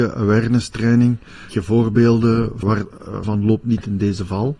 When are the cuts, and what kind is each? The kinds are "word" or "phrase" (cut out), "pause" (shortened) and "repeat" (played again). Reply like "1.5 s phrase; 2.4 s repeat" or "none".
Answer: 1.5 s word; 2.6 s word; 3.2 s word